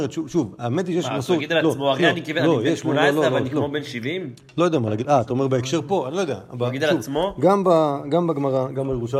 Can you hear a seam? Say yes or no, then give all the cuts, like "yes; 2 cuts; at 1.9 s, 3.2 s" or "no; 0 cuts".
no; 0 cuts